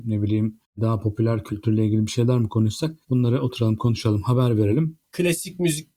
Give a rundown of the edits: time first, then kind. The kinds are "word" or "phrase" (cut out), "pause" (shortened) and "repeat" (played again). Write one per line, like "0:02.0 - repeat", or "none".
0:03.0 - pause